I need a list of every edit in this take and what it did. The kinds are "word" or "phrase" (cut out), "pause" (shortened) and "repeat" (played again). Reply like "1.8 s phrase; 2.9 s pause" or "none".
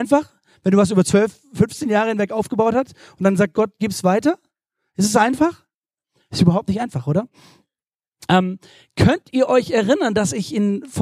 none